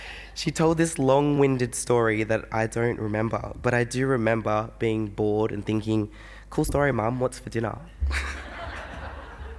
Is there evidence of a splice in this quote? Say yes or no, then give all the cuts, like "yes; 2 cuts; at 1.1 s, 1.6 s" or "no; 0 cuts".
no; 0 cuts